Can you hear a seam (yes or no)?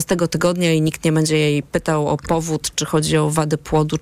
no